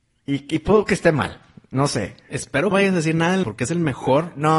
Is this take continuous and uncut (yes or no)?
no